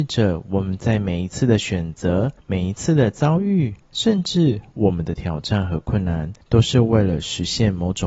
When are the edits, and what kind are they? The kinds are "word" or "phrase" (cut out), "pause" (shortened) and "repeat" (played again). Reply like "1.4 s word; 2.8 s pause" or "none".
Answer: 2.4 s pause; 3.8 s pause; 6.4 s pause